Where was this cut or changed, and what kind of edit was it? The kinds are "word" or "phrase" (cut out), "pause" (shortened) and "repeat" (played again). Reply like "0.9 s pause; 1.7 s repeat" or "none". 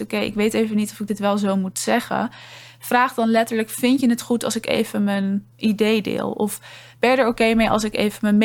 none